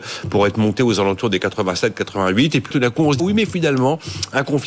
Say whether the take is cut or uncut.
cut